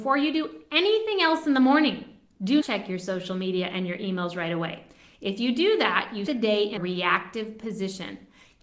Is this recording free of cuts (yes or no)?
no